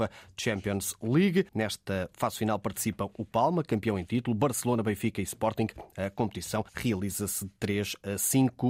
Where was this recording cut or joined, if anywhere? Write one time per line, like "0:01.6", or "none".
0:01.5
0:06.7